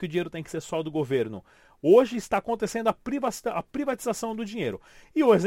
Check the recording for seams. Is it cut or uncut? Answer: uncut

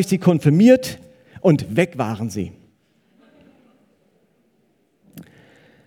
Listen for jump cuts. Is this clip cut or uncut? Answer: uncut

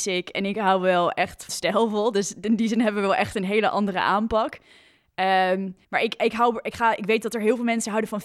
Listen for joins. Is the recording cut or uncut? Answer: cut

